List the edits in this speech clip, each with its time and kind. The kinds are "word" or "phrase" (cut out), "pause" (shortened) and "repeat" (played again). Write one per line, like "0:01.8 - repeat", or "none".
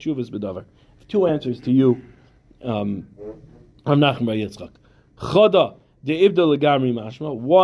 none